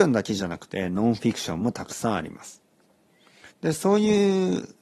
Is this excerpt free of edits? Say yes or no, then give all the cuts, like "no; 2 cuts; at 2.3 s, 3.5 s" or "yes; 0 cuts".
no; 1 cut; at 3.5 s